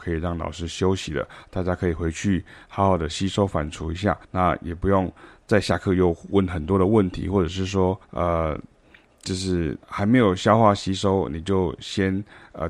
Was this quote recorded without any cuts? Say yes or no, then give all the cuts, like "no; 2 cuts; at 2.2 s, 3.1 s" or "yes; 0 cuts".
no; 3 cuts; at 4.2 s, 8.0 s, 9.8 s